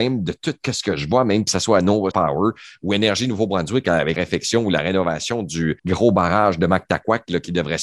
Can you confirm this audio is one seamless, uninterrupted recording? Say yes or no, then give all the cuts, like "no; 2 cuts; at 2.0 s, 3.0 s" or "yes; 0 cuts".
no; 3 cuts; at 2.1 s, 4.2 s, 5.8 s